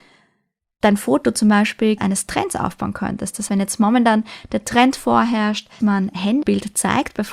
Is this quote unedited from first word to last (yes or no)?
no